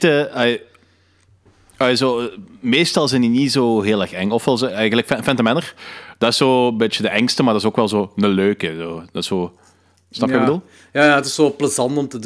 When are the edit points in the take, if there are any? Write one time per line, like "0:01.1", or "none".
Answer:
none